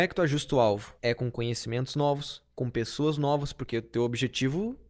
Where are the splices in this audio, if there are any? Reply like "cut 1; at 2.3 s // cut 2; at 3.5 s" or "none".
cut 1; at 1.0 s